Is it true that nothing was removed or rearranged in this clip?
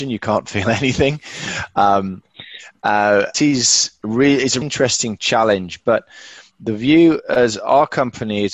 no; 2 cuts; at 3.3 s, 4.6 s

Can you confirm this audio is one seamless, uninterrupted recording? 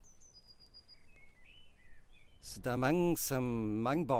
yes; 0 cuts

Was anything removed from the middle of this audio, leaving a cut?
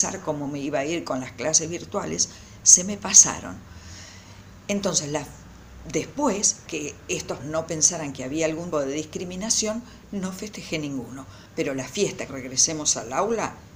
yes; 5 cuts; at 6.7 s, 7.4 s, 8.7 s, 11.5 s, 12.3 s

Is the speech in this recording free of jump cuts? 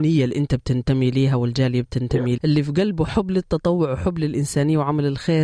no; 1 cut; at 2.4 s

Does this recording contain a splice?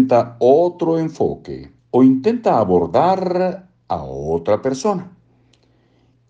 yes; 1 cut; at 1.8 s

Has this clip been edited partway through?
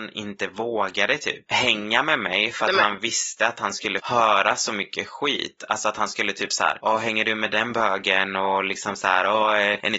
yes; 1 cut; at 4.0 s

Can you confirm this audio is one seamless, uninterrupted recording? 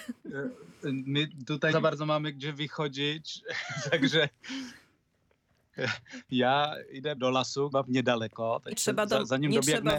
no; 4 cuts; at 1.7 s, 7.2 s, 7.7 s, 8.7 s

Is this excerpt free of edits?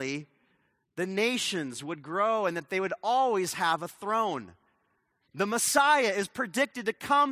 yes; 0 cuts

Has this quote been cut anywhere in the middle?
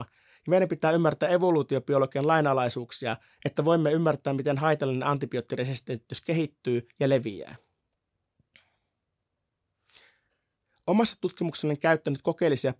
no; 0 cuts

